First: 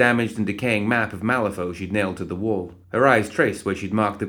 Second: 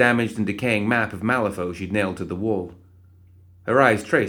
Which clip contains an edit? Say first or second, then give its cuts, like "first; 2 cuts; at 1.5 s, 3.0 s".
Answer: first; 1 cut; at 2.8 s